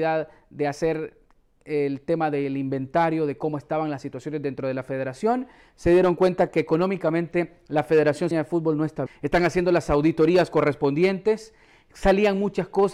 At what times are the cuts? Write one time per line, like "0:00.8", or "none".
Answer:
0:08.3
0:09.1